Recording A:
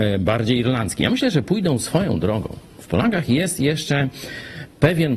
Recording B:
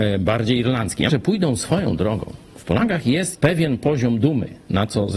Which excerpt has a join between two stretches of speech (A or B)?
B